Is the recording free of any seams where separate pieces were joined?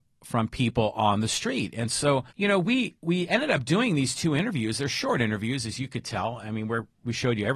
no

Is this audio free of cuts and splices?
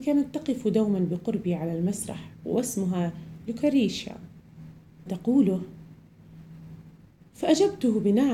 no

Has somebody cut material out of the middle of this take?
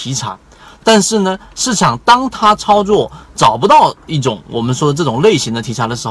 no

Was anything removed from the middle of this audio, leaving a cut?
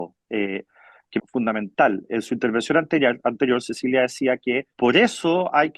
yes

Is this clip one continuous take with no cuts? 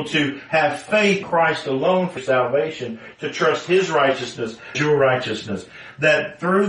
no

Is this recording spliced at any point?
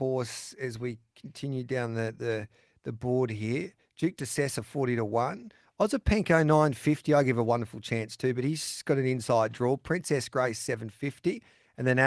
no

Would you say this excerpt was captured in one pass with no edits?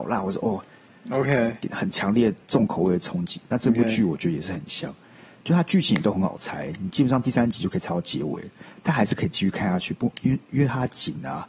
yes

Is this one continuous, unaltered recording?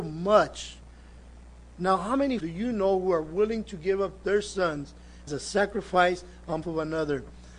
no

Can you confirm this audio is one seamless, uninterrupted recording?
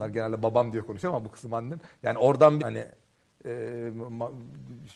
no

